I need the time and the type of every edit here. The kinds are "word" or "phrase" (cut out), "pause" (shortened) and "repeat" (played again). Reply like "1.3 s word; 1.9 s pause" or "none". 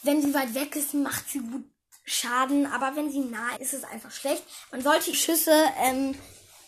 3.6 s phrase; 5.1 s word